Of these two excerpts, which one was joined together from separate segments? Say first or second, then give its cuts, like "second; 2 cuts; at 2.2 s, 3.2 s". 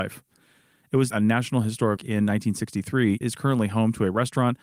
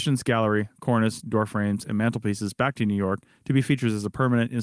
first; 3 cuts; at 1.1 s, 2.0 s, 3.2 s